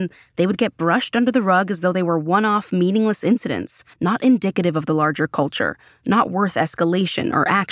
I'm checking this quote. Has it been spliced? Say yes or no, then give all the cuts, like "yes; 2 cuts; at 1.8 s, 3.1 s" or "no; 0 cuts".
yes; 1 cut; at 3.9 s